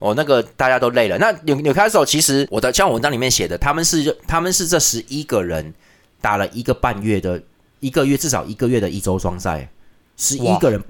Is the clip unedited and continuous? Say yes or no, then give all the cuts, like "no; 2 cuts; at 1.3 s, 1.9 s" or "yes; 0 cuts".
yes; 0 cuts